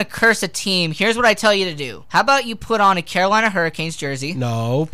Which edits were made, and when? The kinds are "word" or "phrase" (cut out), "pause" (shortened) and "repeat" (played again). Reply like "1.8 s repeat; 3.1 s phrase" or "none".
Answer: 2.1 s pause